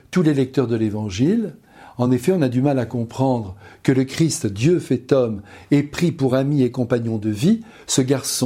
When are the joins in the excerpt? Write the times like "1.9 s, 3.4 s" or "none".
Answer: none